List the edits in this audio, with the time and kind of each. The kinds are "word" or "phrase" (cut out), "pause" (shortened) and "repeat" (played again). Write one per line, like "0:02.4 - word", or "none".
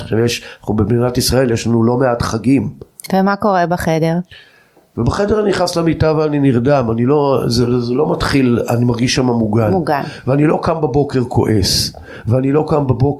none